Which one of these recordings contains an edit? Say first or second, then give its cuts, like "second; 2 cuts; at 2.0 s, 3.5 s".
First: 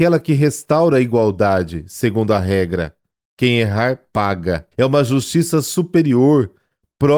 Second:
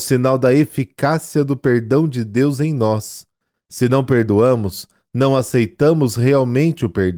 first; 1 cut; at 4.7 s